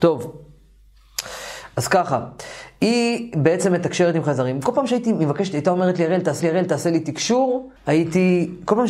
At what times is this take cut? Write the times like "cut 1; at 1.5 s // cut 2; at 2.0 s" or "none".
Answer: cut 1; at 6.4 s // cut 2; at 7.8 s

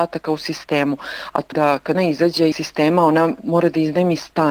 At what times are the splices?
cut 1; at 1.5 s // cut 2; at 1.9 s // cut 3; at 2.5 s

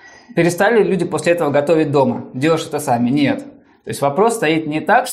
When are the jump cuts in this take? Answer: none

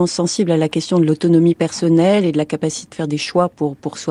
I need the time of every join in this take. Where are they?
cut 1; at 2.9 s

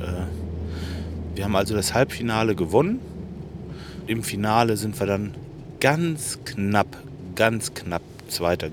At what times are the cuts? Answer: cut 1; at 1.4 s // cut 2; at 4.1 s

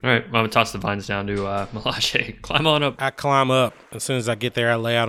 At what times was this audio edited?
none

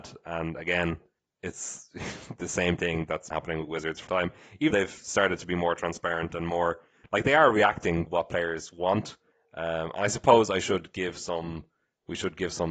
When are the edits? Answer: cut 1; at 3.3 s // cut 2; at 4.1 s // cut 3; at 4.7 s // cut 4; at 8.1 s

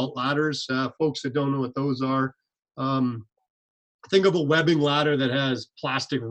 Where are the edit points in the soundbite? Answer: cut 1; at 1.0 s

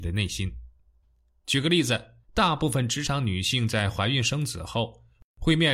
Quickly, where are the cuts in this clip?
cut 1; at 2.2 s

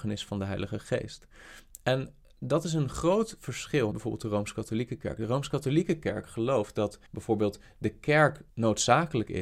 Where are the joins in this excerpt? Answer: cut 1; at 3.9 s // cut 2; at 7.1 s // cut 3; at 8.5 s

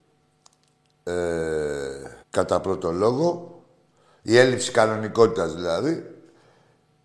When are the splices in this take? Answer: cut 1; at 2.2 s

